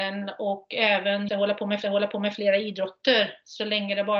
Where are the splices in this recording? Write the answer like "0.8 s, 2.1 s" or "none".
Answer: 1.3 s, 1.8 s